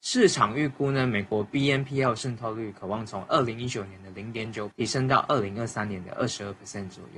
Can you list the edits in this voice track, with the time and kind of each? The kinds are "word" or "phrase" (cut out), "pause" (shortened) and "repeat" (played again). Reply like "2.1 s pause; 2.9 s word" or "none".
4.7 s word